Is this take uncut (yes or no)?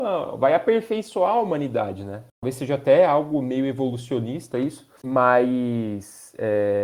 no